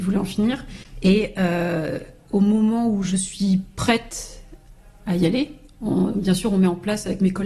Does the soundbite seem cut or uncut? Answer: uncut